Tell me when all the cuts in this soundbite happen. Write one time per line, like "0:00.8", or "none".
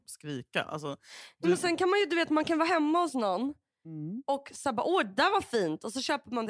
none